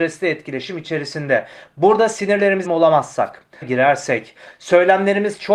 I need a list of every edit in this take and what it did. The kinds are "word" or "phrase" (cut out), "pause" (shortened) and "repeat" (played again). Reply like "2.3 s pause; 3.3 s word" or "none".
2.6 s word; 3.6 s phrase